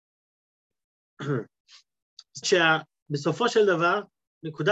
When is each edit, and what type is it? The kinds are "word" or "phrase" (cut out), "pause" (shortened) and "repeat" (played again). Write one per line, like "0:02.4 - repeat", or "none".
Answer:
0:02.4 - word